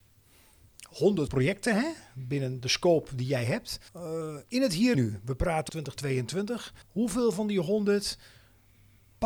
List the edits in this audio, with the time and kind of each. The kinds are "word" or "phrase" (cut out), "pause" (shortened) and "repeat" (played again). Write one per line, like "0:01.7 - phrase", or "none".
0:01.3 - word
0:02.6 - word
0:03.9 - pause
0:04.9 - word
0:05.7 - phrase
0:06.8 - pause